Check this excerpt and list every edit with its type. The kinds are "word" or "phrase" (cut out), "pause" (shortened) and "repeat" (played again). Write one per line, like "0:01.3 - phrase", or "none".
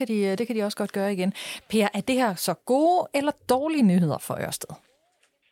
none